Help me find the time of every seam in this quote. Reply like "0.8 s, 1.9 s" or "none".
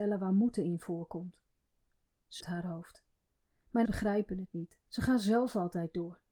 2.4 s, 3.8 s, 4.8 s